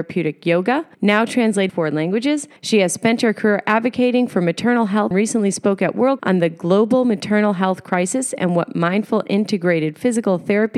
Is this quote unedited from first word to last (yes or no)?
no